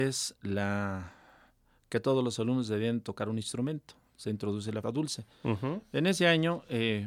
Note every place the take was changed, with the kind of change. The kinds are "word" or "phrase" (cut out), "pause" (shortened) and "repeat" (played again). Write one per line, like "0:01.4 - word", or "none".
0:04.8 - word